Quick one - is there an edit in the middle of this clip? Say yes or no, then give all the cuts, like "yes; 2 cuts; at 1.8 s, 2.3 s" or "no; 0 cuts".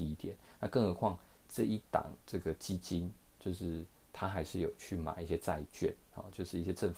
yes; 2 cuts; at 2.2 s, 3.4 s